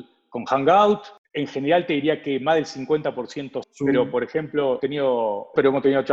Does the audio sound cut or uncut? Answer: cut